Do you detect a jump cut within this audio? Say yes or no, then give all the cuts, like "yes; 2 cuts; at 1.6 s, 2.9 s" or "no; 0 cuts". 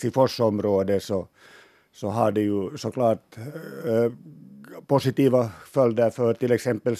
no; 0 cuts